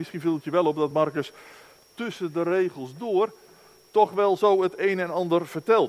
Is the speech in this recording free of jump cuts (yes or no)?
yes